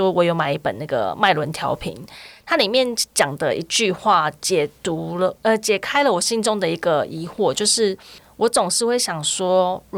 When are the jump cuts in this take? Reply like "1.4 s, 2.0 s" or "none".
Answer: none